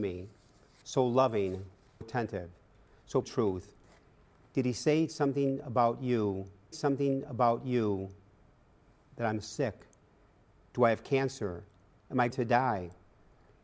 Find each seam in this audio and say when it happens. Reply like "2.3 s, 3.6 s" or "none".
2.0 s, 3.2 s, 6.7 s, 12.3 s